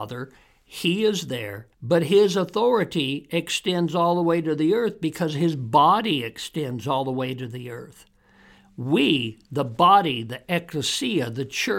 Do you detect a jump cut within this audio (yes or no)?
yes